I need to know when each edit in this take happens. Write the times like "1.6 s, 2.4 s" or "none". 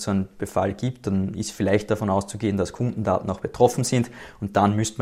none